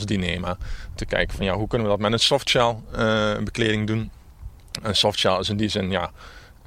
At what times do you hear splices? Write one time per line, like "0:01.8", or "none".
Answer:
0:01.0